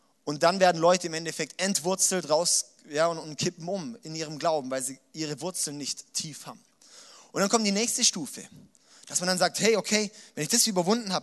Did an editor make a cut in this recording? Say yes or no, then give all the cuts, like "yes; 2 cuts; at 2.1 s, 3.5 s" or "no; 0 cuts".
no; 0 cuts